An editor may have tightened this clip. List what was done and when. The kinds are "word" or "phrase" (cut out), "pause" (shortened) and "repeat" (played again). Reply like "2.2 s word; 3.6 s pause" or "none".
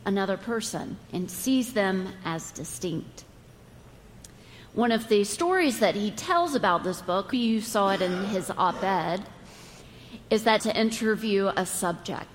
1.0 s pause; 7.3 s word; 10.6 s phrase

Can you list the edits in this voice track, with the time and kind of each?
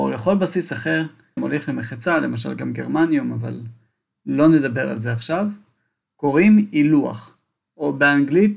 1.4 s word

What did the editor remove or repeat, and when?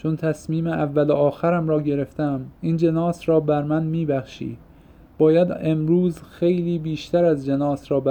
2.5 s pause

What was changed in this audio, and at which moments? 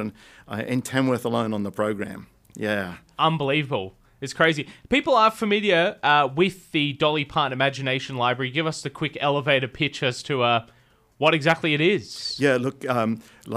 none

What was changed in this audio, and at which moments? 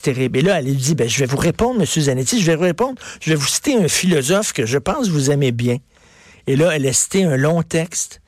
none

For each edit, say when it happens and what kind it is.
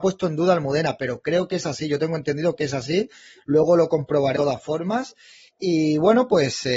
4.4 s word

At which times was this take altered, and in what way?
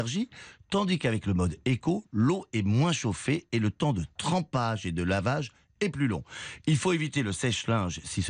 none

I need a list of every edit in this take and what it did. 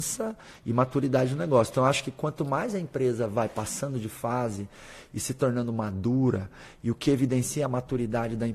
none

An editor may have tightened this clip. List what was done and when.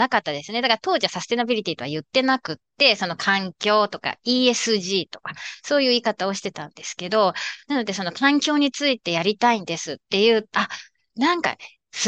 10.5 s phrase

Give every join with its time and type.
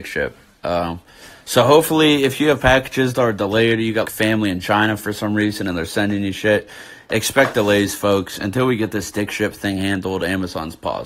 4.0 s word

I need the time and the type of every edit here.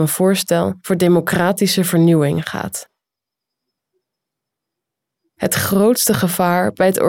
none

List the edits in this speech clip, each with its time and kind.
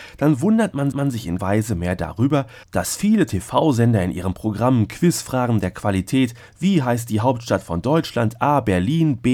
0.9 s repeat; 1.4 s word; 2.6 s pause

